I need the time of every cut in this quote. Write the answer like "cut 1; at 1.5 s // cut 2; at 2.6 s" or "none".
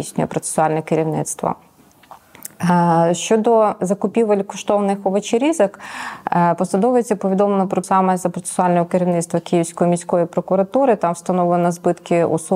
cut 1; at 7.8 s